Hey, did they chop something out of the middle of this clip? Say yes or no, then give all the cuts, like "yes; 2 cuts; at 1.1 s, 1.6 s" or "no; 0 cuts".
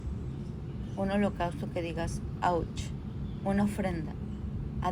no; 0 cuts